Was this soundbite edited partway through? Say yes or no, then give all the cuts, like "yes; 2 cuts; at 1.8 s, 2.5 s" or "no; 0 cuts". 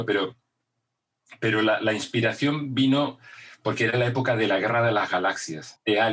no; 0 cuts